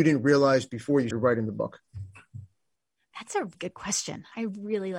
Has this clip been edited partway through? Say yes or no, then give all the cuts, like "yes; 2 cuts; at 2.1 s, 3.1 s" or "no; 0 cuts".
yes; 2 cuts; at 1.1 s, 3.5 s